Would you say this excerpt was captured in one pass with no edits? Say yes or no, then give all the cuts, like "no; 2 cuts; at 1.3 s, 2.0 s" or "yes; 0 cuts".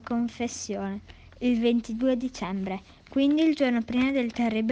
yes; 0 cuts